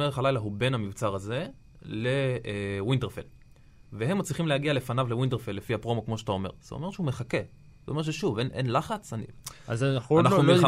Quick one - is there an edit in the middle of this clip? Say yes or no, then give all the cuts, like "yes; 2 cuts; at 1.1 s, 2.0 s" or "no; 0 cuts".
no; 0 cuts